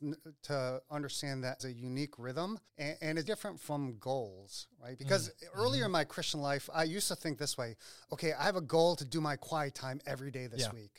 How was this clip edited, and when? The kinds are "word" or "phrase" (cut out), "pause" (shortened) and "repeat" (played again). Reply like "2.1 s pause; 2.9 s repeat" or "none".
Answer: 1.6 s phrase; 2.7 s pause; 3.3 s word